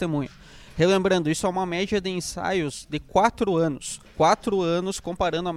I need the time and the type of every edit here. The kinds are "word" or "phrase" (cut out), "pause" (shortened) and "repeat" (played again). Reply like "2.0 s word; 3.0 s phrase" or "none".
4.1 s pause

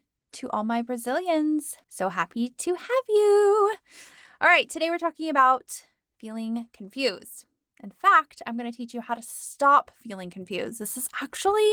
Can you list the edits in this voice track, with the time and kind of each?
1.8 s pause

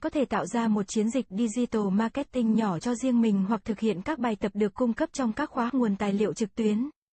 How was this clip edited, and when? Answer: 5.7 s phrase

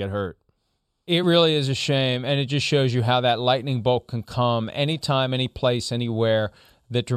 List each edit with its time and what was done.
none

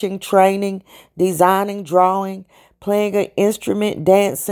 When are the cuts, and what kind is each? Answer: none

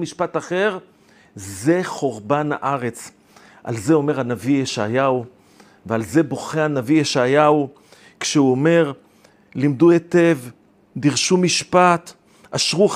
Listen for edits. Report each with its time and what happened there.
none

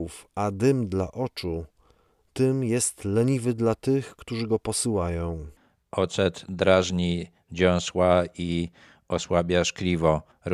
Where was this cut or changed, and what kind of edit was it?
none

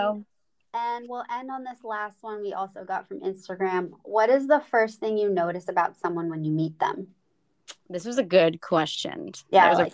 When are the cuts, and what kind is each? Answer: none

